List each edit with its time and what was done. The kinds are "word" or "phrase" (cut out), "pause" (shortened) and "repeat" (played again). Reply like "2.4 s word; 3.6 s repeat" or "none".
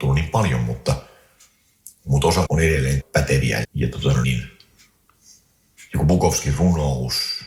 2.4 s word; 3.0 s word; 3.6 s word; 4.2 s word